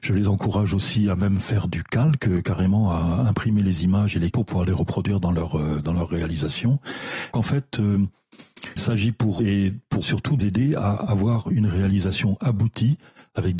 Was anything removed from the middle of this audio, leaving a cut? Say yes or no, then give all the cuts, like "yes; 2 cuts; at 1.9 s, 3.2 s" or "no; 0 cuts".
yes; 6 cuts; at 4.3 s, 7.3 s, 8.8 s, 9.4 s, 10.0 s, 10.4 s